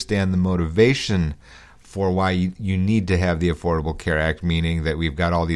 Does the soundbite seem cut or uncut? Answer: uncut